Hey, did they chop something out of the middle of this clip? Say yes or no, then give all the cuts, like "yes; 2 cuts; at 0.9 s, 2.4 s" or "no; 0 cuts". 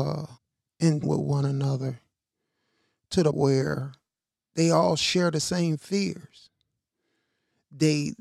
yes; 2 cuts; at 1.0 s, 3.3 s